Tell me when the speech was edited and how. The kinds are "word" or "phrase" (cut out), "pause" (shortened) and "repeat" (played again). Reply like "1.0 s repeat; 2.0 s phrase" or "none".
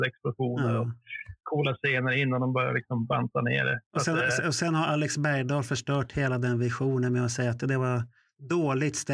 none